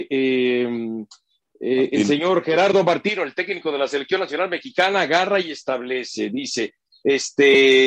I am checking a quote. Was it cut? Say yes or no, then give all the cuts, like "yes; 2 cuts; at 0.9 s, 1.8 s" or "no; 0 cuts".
no; 0 cuts